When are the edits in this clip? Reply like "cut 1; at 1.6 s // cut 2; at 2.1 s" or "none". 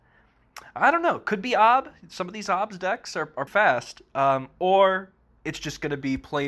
cut 1; at 3.5 s